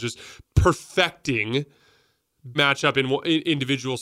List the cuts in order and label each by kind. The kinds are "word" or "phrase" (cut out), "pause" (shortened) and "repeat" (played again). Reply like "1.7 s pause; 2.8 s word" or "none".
2.5 s phrase